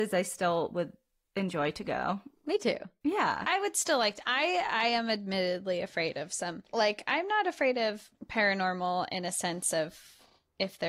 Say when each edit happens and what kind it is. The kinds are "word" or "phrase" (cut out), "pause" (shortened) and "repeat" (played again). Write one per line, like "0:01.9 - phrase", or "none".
none